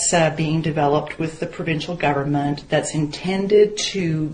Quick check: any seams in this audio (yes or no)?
no